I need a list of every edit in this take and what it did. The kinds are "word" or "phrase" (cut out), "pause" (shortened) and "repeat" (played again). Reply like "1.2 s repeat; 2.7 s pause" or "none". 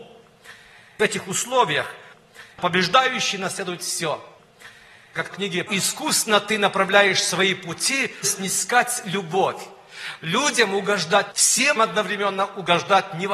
2.5 s pause; 5.3 s word; 5.7 s phrase; 8.2 s word; 11.3 s word; 11.8 s word